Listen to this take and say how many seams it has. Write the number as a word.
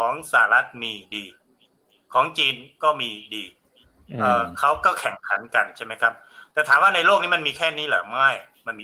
zero